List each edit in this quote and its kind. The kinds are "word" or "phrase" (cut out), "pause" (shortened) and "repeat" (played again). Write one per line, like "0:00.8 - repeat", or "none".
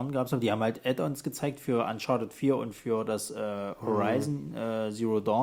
none